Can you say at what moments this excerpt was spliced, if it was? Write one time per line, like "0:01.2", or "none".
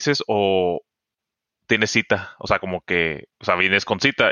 none